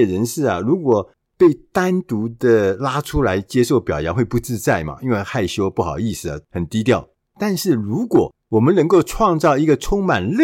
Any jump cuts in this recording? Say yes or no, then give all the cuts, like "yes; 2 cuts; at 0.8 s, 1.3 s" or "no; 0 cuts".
yes; 1 cut; at 6.4 s